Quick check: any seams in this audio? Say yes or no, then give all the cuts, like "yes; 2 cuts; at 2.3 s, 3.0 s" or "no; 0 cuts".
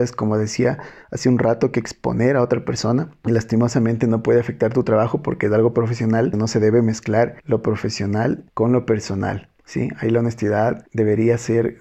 no; 0 cuts